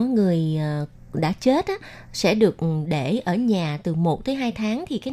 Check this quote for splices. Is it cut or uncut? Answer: uncut